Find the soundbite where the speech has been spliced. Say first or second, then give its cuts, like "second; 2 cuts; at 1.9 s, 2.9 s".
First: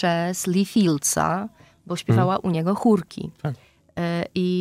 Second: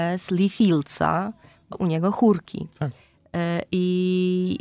second; 1 cut; at 1.7 s